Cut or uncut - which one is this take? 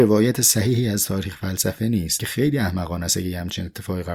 cut